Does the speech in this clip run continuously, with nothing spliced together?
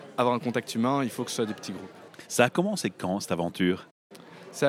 yes; 0 cuts

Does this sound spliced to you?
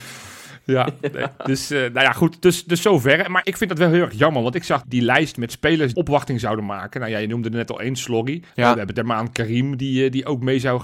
yes; 5 cuts; at 3.4 s, 4.8 s, 5.9 s, 8.5 s, 8.9 s

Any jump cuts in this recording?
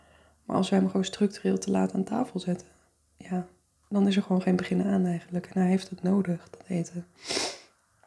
no; 0 cuts

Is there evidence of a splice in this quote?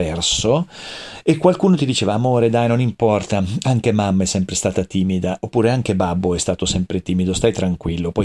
no; 0 cuts

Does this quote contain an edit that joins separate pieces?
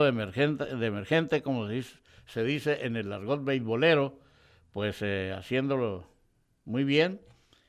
no; 0 cuts

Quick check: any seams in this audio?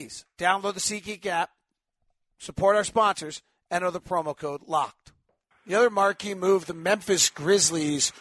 no; 0 cuts

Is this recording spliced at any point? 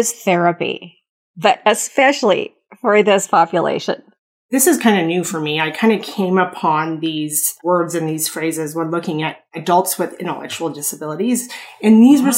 no; 0 cuts

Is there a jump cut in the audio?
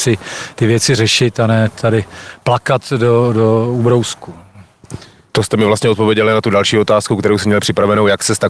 no; 0 cuts

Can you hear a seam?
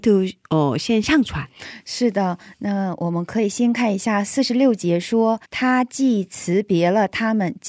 yes; 1 cut; at 5.4 s

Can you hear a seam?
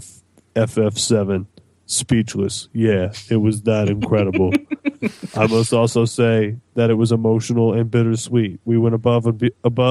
no; 0 cuts

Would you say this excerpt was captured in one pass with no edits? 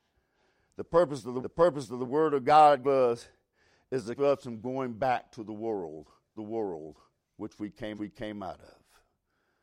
no; 5 cuts; at 1.4 s, 2.8 s, 4.1 s, 6.4 s, 7.9 s

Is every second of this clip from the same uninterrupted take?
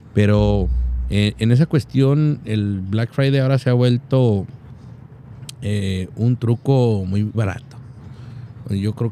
no; 1 cut; at 7.3 s

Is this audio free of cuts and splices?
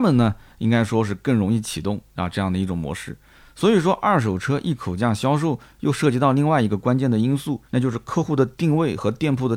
no; 1 cut; at 7.7 s

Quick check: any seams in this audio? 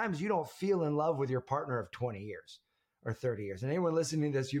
no; 0 cuts

